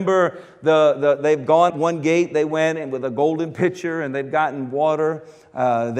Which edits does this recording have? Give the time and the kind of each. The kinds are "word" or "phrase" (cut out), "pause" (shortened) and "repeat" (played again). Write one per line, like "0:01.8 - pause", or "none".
0:01.7 - word

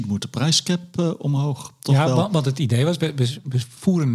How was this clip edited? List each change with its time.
none

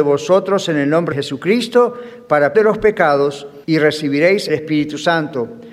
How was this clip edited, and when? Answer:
0:01.1 - word
0:02.5 - word
0:03.6 - pause
0:04.5 - phrase

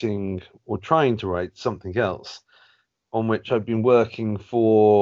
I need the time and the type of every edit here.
none

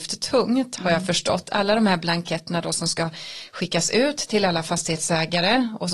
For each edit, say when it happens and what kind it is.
none

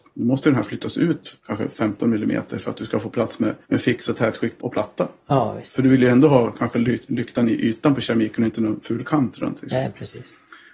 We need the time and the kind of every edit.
0:01.4 - pause
0:03.6 - pause
0:04.6 - word

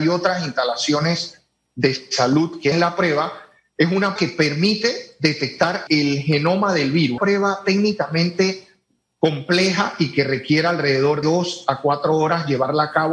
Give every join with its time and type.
0:02.7 - word
0:04.2 - word
0:05.9 - word
0:07.2 - word
0:11.2 - word

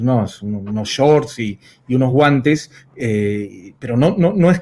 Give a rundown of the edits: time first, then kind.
none

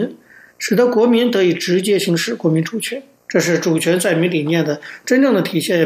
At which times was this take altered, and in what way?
0:03.2 - pause

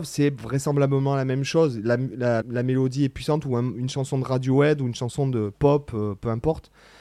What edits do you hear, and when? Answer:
0:02.4 - word

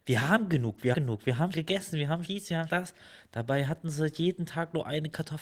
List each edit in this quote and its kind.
0:00.9 - word
0:01.5 - word
0:02.2 - word
0:02.7 - word

